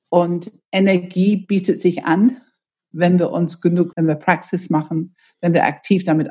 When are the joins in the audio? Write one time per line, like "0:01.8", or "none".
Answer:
0:03.9